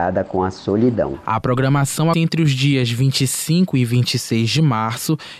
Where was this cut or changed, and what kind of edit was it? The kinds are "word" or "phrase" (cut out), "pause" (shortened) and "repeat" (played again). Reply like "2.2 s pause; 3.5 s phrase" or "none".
2.1 s word